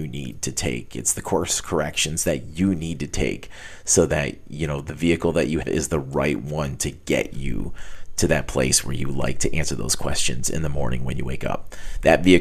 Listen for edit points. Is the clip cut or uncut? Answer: cut